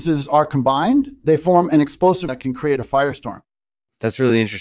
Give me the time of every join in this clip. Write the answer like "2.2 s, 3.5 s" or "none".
2.3 s